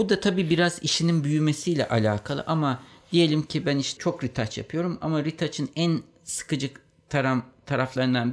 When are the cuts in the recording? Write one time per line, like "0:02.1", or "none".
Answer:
none